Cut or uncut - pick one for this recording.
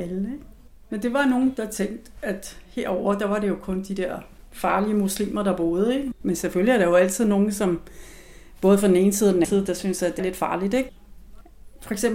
cut